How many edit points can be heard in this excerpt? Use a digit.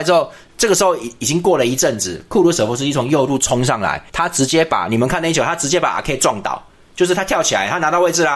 1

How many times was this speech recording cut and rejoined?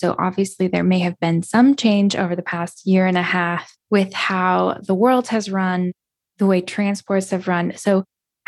1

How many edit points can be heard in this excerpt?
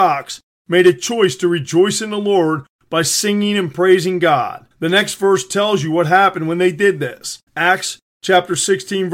2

